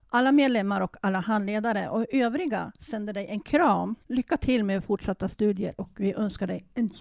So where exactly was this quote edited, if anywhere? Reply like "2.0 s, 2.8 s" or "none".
4.0 s